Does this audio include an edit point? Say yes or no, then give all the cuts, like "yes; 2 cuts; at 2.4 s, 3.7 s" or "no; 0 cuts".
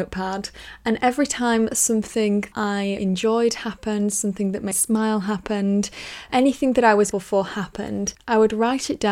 yes; 5 cuts; at 2.5 s, 3.0 s, 4.7 s, 6.3 s, 7.1 s